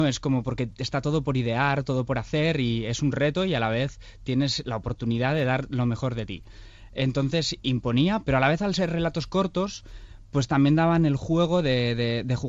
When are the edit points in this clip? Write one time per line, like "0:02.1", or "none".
0:08.2